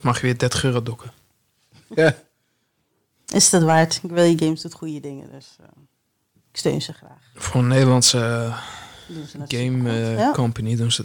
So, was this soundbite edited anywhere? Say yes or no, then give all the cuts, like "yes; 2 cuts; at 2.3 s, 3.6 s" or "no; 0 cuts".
no; 0 cuts